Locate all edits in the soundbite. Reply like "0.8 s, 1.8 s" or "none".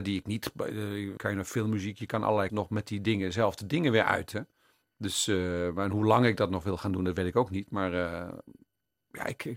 1.2 s, 2.5 s, 4.7 s